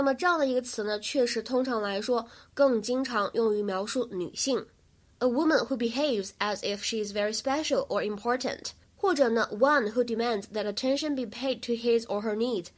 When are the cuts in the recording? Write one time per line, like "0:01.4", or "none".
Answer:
none